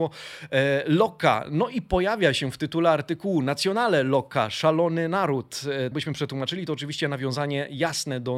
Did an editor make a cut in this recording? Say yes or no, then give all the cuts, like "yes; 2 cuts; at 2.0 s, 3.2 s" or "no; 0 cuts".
yes; 1 cut; at 5.9 s